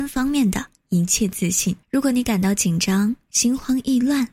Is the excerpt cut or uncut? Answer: cut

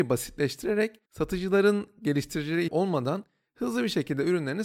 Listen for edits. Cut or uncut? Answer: cut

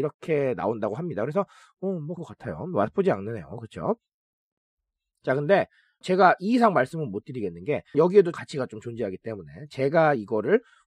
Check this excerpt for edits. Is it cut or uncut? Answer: cut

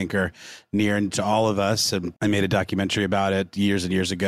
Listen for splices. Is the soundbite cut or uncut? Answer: cut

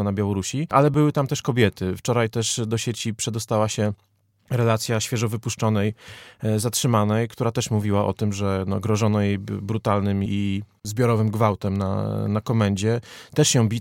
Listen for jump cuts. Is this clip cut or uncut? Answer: cut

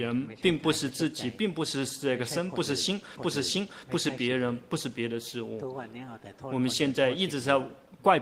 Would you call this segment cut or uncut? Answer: cut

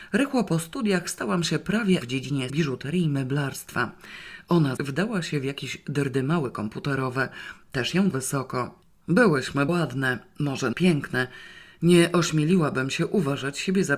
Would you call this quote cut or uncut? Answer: cut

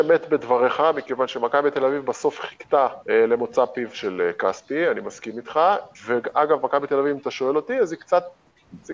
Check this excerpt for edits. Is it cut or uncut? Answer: cut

